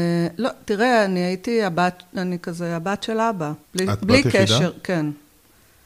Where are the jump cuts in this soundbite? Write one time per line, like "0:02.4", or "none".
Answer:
0:03.7